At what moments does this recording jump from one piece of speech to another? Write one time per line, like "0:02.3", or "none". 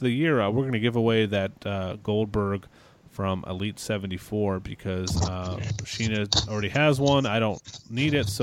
none